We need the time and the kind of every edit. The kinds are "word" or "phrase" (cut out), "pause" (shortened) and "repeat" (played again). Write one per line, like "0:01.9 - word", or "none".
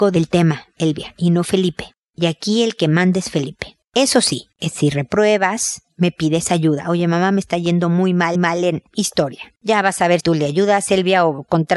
0:08.3 - repeat
0:10.2 - word